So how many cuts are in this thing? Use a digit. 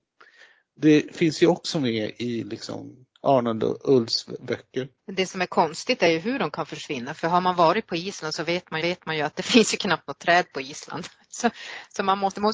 3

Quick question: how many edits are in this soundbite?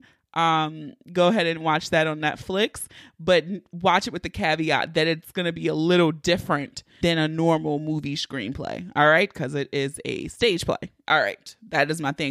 1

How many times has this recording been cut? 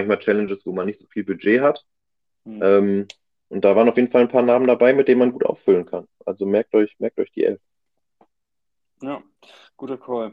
0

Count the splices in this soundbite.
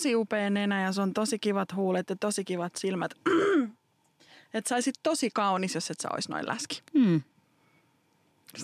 0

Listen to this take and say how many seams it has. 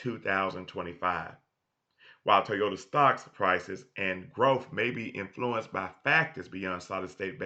0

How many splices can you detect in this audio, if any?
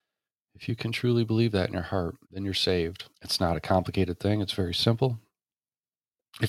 2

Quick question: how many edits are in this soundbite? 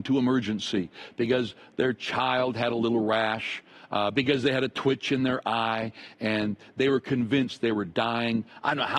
0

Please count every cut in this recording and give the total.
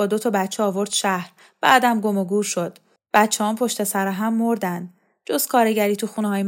0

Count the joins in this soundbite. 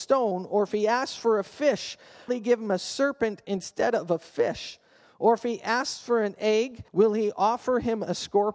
2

